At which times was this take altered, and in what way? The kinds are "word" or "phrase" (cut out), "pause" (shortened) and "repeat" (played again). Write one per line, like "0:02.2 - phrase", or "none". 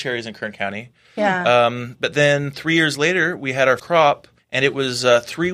0:03.8 - word
0:04.4 - pause